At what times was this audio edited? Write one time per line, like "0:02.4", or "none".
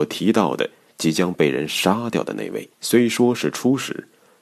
0:02.7